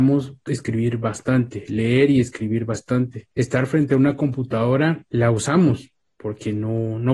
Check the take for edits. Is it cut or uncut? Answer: cut